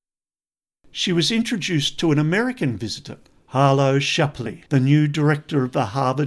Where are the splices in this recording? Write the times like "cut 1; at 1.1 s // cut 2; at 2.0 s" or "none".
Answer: cut 1; at 3.2 s // cut 2; at 4.7 s